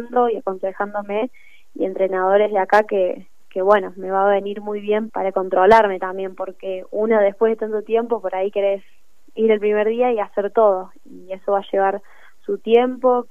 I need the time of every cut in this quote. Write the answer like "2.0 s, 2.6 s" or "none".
5.1 s